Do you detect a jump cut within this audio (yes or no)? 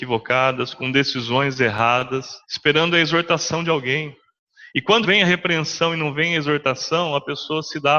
yes